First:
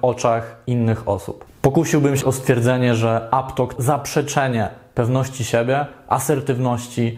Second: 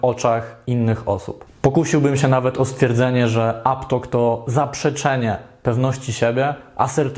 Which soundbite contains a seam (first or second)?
first